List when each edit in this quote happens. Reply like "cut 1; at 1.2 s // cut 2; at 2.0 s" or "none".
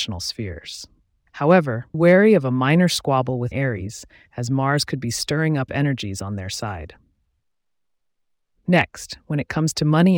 cut 1; at 1.9 s // cut 2; at 3.5 s // cut 3; at 5.7 s

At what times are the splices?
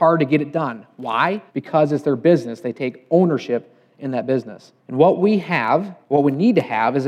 cut 1; at 1.5 s // cut 2; at 4.8 s // cut 3; at 6.0 s

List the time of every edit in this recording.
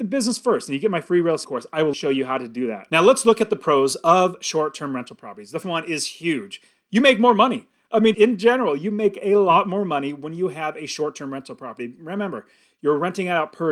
cut 1; at 1.4 s // cut 2; at 1.9 s // cut 3; at 5.6 s // cut 4; at 8.1 s

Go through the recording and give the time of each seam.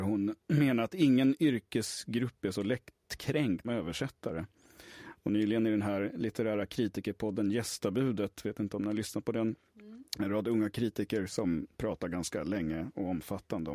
cut 1; at 3.6 s // cut 2; at 10.1 s

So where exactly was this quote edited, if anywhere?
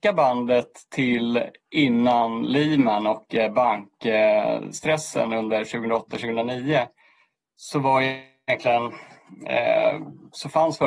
none

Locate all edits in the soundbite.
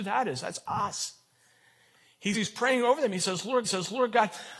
cut 1; at 2.3 s // cut 2; at 3.6 s

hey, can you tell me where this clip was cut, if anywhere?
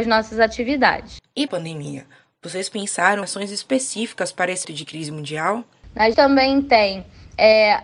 cut 1; at 1.5 s // cut 2; at 3.2 s // cut 3; at 4.6 s // cut 4; at 6.1 s

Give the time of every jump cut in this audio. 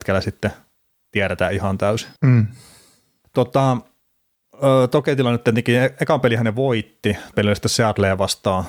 cut 1; at 2.2 s // cut 2; at 7.3 s

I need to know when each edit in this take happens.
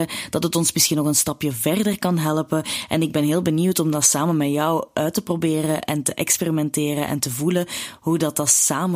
none

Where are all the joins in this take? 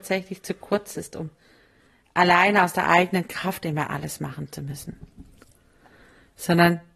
none

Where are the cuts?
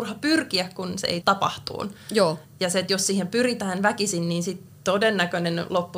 cut 1; at 1.2 s

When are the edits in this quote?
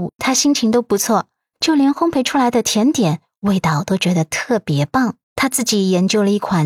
cut 1; at 5.2 s

